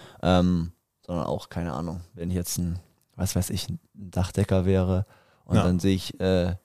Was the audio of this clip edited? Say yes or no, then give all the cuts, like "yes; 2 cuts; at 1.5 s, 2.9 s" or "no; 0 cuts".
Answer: no; 0 cuts